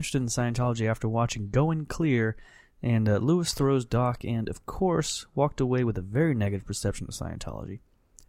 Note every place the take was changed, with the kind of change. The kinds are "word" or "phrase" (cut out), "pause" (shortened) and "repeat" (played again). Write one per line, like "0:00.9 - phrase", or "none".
none